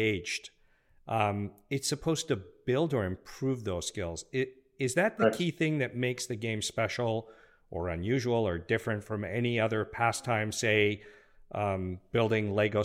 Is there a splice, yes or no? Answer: no